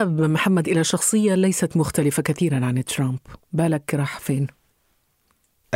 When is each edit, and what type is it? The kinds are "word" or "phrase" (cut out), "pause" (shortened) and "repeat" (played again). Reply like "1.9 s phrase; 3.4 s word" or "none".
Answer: 3.4 s pause